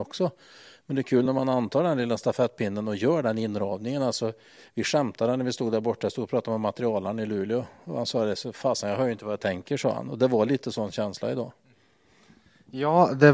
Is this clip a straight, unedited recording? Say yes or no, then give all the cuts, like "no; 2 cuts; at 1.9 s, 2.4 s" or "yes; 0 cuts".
yes; 0 cuts